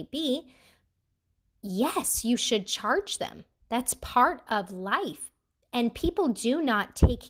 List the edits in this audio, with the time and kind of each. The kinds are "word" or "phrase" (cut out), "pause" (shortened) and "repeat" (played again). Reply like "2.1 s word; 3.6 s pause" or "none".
none